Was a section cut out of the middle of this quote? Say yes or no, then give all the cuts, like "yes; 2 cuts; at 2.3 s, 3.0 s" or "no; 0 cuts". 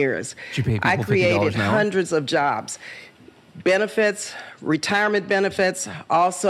no; 0 cuts